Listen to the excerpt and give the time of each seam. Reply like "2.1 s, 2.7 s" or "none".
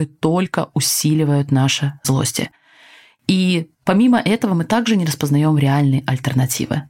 2.0 s